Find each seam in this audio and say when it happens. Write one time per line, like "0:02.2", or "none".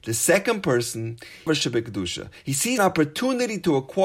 0:01.5
0:02.8